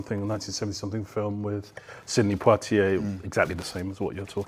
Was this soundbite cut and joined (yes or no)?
no